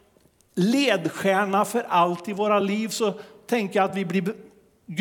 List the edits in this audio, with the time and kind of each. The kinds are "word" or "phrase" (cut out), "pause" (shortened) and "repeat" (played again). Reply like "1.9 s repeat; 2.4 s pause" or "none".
none

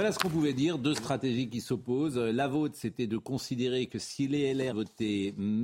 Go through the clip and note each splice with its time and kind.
4.7 s word

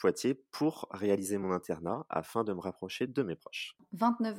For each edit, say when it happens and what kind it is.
none

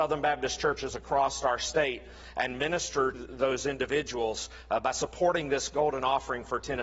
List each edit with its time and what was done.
3.1 s word

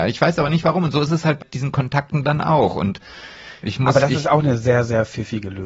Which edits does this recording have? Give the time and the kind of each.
1.4 s word; 3.6 s phrase

